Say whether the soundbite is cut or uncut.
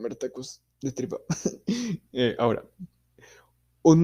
uncut